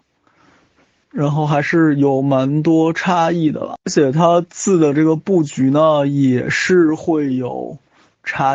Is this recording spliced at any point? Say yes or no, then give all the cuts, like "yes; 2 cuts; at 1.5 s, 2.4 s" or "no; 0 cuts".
yes; 1 cut; at 3.8 s